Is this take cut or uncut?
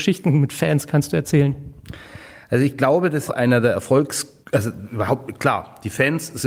cut